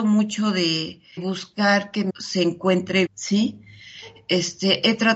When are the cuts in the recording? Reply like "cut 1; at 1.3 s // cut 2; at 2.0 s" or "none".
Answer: cut 1; at 1.2 s // cut 2; at 2.1 s // cut 3; at 3.1 s